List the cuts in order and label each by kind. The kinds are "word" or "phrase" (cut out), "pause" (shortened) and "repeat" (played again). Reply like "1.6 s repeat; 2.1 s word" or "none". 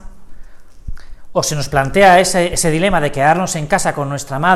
none